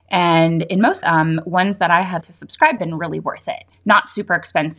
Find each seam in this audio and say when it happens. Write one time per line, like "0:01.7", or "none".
0:01.0
0:02.2
0:02.8
0:03.7